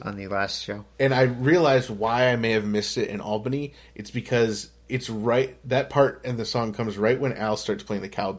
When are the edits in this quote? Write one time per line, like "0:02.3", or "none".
none